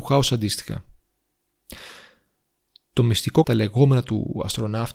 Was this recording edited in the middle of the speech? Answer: yes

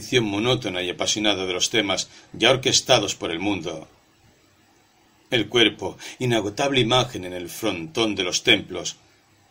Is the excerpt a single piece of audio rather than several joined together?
yes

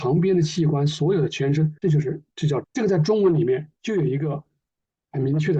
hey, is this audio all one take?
no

